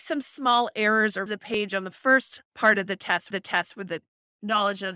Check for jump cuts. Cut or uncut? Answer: cut